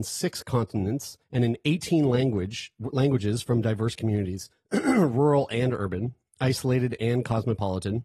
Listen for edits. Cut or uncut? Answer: cut